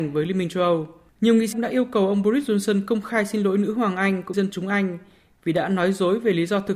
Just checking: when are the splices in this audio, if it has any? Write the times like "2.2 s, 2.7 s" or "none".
1.5 s, 4.3 s